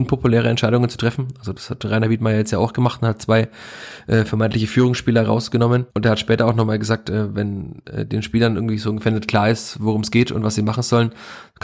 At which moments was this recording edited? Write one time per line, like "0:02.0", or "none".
0:05.9